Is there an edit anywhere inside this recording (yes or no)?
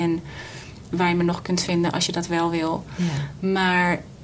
no